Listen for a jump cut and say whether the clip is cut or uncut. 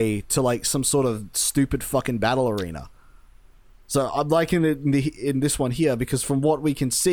uncut